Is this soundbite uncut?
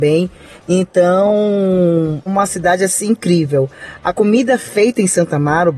no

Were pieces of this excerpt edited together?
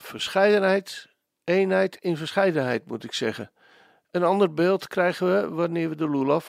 no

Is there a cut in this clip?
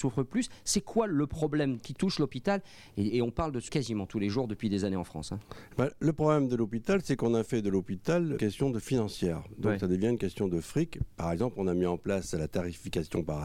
yes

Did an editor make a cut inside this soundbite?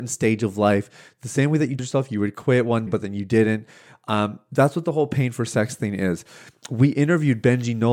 yes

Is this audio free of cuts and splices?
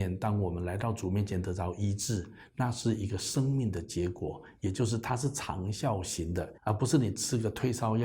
no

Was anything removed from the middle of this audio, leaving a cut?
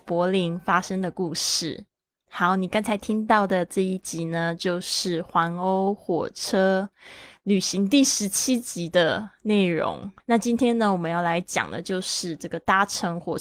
yes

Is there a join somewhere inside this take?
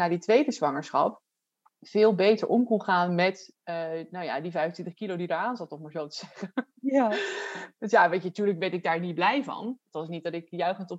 no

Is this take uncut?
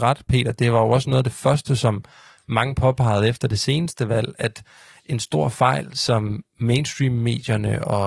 yes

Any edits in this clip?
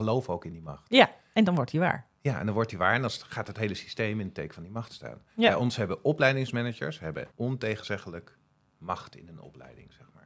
yes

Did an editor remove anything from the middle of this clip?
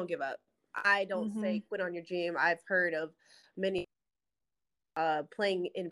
no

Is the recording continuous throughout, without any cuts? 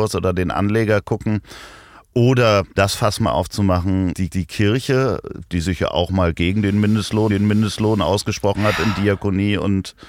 no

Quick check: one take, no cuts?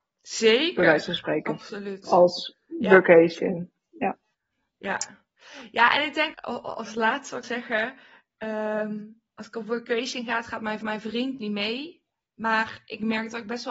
no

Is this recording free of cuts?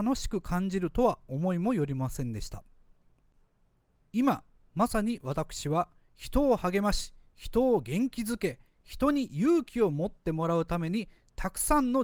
yes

